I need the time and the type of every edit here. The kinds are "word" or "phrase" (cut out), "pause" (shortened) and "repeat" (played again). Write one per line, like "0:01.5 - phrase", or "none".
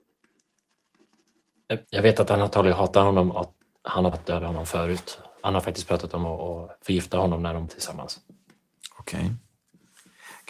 0:01.8 - pause
0:03.7 - pause
0:04.1 - phrase
0:05.4 - pause
0:07.7 - word